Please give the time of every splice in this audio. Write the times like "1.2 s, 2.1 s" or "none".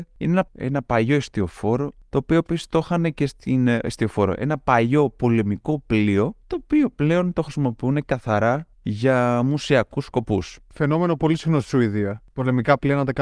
none